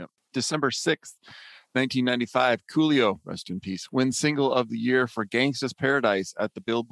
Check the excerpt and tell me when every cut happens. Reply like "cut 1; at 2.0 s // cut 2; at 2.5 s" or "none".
none